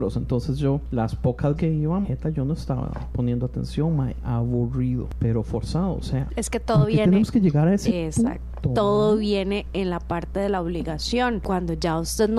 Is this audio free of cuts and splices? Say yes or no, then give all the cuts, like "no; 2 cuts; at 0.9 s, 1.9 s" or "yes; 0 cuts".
no; 2 cuts; at 1.6 s, 2.0 s